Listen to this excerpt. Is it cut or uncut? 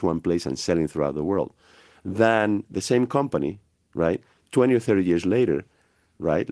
uncut